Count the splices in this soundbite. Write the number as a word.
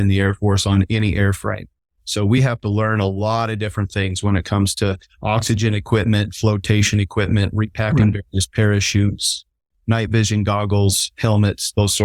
zero